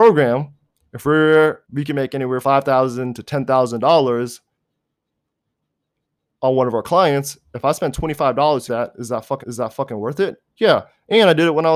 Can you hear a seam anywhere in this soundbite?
yes; 4 cuts; at 1.6 s, 2.4 s, 8.7 s, 9.4 s

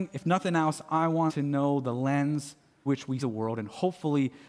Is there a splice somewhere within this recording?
yes; 3 cuts; at 1.3 s, 2.9 s, 3.2 s

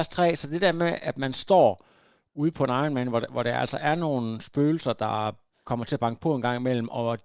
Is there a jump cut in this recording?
no; 0 cuts

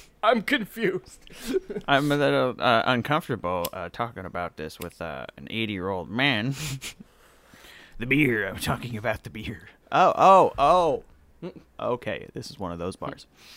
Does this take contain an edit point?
yes; 1 cut; at 7.1 s

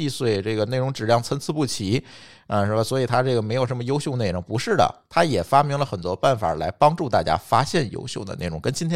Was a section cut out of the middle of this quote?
no; 0 cuts

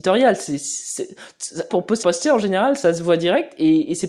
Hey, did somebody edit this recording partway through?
yes; 2 cuts; at 1.7 s, 2.0 s

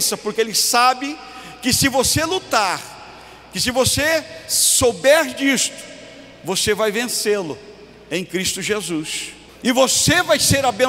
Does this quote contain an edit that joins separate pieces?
yes; 1 cut; at 9.5 s

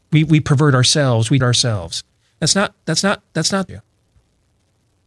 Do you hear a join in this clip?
yes; 3 cuts; at 1.4 s, 3.0 s, 3.7 s

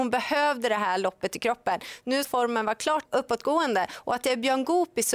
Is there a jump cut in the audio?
yes; 2 cuts; at 2.2 s, 3.1 s

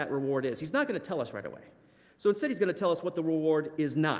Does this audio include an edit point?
no; 0 cuts

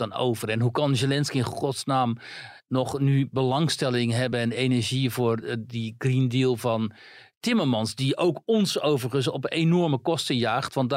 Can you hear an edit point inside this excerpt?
no; 0 cuts

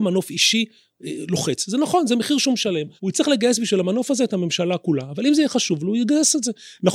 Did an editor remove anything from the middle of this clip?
yes; 1 cut; at 3.0 s

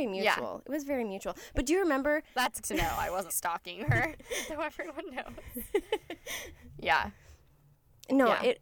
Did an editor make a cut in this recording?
yes; 3 cuts; at 2.6 s, 3.3 s, 4.5 s

